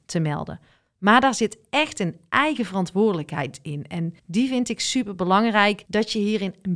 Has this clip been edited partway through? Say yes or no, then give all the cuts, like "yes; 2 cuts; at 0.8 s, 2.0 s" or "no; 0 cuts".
yes; 2 cuts; at 4.2 s, 5.9 s